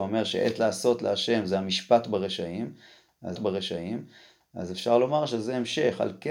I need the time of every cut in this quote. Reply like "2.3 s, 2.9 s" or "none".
3.4 s